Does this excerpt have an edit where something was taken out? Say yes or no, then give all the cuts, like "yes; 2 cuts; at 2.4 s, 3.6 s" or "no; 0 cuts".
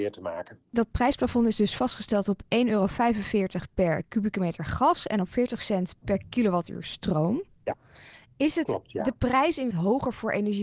yes; 1 cut; at 9.7 s